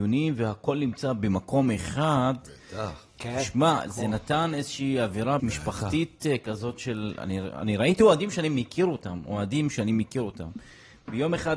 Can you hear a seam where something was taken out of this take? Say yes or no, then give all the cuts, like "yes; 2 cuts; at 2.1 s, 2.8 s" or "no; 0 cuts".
yes; 1 cut; at 5.4 s